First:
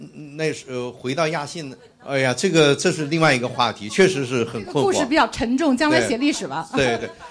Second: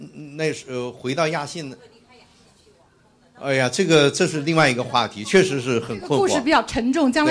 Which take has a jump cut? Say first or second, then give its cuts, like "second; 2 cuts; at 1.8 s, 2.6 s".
first; 1 cut; at 1.9 s